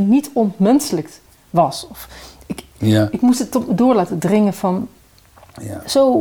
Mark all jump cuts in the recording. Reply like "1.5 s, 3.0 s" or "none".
none